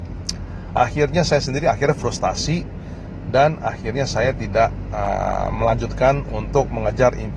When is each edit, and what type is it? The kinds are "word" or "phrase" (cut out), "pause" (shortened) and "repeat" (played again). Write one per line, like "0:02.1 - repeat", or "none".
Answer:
none